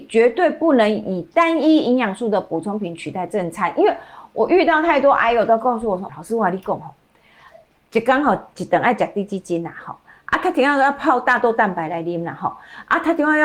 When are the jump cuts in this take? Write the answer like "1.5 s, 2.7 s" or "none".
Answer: 6.1 s